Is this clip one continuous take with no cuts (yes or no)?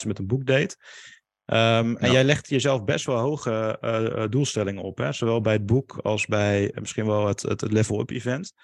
yes